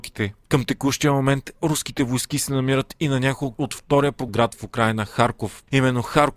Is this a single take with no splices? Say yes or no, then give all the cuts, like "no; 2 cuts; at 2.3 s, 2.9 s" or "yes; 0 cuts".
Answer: no; 2 cuts; at 3.6 s, 4.3 s